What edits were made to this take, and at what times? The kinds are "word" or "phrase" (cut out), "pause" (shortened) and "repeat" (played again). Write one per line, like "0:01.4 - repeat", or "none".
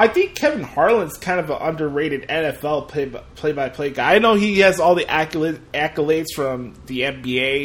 none